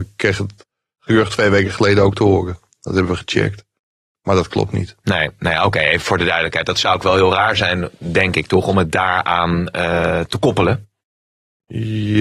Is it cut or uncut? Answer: uncut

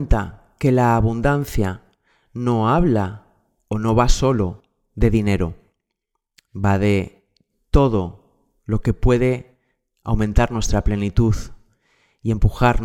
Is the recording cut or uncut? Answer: uncut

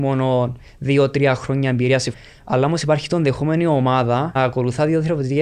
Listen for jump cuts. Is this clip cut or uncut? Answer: cut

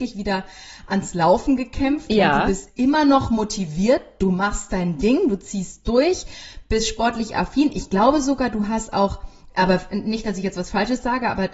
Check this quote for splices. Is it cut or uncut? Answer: uncut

